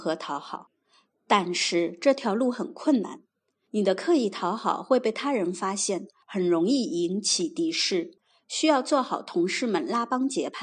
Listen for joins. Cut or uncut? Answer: uncut